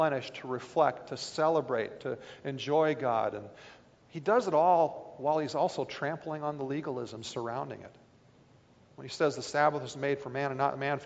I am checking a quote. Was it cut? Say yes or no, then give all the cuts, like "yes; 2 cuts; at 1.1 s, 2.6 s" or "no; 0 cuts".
no; 0 cuts